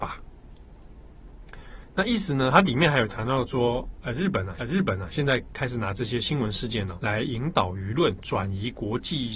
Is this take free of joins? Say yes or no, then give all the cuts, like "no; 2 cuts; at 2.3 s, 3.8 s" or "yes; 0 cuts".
no; 2 cuts; at 4.6 s, 7.0 s